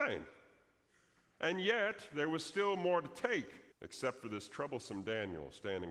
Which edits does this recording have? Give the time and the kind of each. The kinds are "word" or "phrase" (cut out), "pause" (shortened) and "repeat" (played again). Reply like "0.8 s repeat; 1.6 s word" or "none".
3.7 s pause